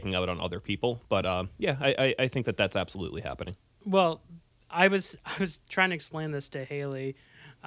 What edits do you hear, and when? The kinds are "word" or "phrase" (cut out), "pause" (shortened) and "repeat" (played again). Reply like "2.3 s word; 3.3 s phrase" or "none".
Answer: 5.6 s pause